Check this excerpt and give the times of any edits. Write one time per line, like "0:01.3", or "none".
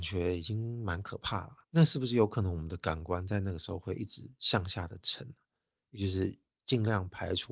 0:01.6